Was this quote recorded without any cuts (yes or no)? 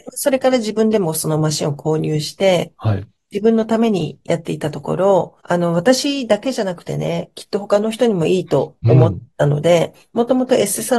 no